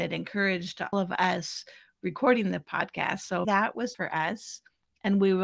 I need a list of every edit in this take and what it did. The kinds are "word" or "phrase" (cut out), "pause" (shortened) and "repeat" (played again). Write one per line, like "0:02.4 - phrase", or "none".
0:00.9 - word
0:03.4 - word
0:03.9 - word